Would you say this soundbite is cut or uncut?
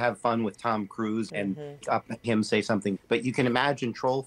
cut